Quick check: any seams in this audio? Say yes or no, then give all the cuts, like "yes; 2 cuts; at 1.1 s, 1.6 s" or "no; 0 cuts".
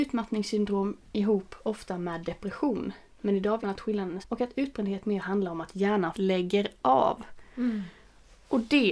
yes; 3 cuts; at 3.6 s, 4.2 s, 6.1 s